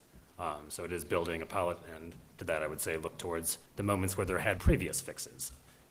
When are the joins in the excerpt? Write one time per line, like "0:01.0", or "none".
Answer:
0:03.7
0:04.6

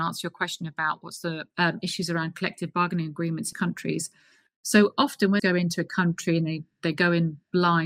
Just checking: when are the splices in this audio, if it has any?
0:01.5
0:03.5
0:05.4

